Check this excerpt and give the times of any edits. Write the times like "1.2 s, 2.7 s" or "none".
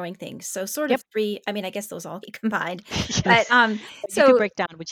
2.2 s